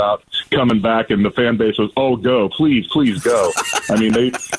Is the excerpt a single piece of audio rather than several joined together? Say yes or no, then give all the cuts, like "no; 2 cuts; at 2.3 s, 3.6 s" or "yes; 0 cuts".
yes; 0 cuts